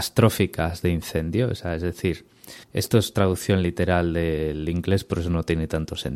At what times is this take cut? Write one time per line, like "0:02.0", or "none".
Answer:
0:02.6